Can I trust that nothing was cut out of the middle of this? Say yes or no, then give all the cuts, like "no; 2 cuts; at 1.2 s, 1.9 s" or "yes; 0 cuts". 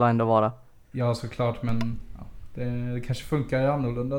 yes; 0 cuts